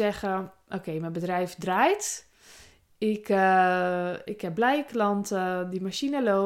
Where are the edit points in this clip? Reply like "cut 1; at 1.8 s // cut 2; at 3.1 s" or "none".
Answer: none